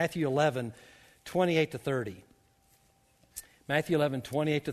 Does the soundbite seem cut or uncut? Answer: uncut